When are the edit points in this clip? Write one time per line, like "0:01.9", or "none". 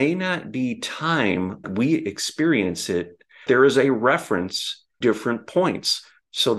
0:01.6
0:03.5
0:05.0